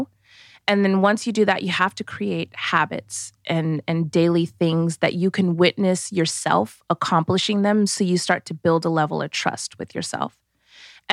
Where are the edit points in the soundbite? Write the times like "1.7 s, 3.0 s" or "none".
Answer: none